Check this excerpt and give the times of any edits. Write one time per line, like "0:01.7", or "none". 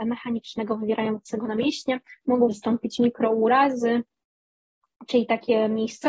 0:02.5